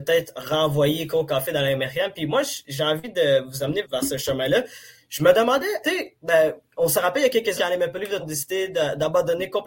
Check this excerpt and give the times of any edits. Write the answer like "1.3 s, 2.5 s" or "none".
3.8 s, 5.8 s, 7.6 s, 8.2 s